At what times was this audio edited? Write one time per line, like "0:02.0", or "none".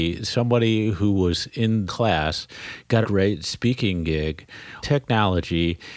0:01.9
0:03.0
0:04.8